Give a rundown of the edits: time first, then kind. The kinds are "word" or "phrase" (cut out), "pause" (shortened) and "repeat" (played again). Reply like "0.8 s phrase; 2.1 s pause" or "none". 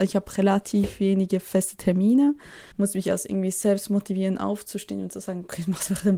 2.7 s pause